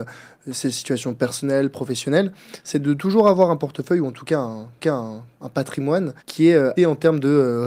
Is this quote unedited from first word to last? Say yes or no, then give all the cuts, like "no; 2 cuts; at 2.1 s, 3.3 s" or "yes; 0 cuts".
no; 3 cuts; at 4.8 s, 6.2 s, 6.8 s